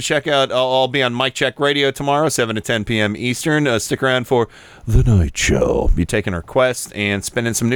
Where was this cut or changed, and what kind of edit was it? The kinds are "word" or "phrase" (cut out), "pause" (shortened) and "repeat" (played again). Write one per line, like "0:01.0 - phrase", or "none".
none

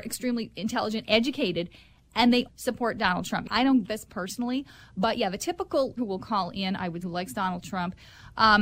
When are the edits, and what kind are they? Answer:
0:01.0 - word
0:02.5 - word
0:03.8 - word
0:06.0 - word
0:07.0 - word

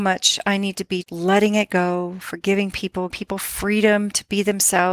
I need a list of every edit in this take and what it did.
0:01.0 - word
0:03.1 - word

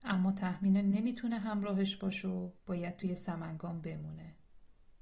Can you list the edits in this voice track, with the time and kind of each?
0:02.6 - pause

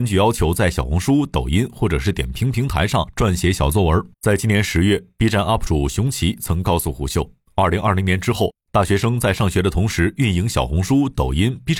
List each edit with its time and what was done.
0:04.1 - pause

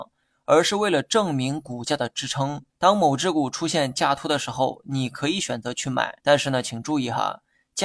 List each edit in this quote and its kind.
0:02.7 - pause
0:06.2 - pause

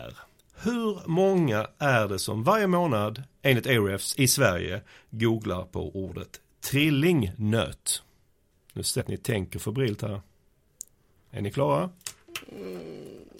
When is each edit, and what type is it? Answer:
0:09.0 - word

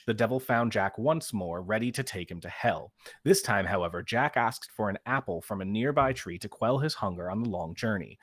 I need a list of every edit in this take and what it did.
none

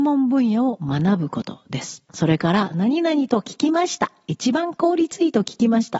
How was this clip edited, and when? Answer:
0:02.1 - pause

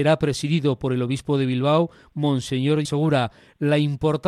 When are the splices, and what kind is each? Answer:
0:02.8 - word

